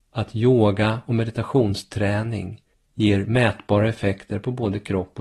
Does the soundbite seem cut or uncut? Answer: cut